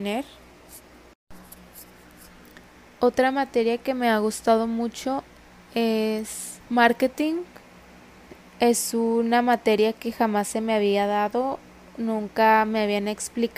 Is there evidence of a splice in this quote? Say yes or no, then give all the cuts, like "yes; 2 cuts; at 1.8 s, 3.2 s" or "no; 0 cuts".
yes; 1 cut; at 6.6 s